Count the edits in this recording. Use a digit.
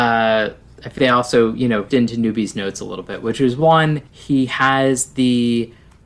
3